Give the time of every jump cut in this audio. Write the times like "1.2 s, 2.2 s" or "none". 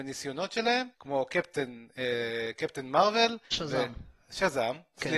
0.9 s, 3.4 s

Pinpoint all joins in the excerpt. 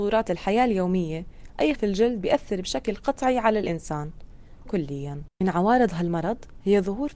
1.7 s, 4.7 s, 5.3 s

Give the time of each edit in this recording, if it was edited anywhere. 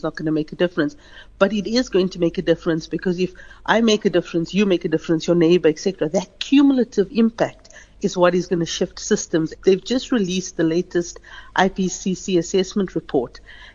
none

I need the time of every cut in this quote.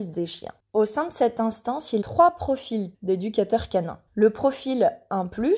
2.0 s, 2.9 s, 4.1 s

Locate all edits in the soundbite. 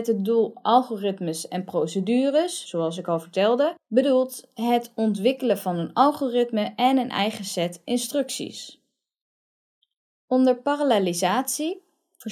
none

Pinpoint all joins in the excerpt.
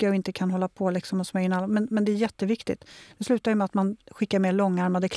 none

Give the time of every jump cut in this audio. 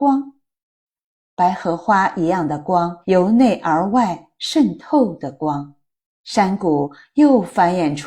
3.0 s, 5.9 s

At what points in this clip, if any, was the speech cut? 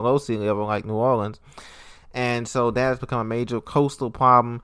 none

